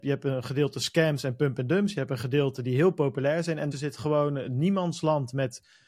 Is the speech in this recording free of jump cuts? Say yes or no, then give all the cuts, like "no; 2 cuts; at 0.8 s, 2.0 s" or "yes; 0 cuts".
no; 1 cut; at 3.7 s